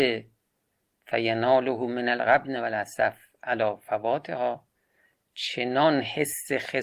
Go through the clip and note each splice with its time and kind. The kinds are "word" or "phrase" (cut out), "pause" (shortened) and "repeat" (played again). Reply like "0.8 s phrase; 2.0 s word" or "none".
none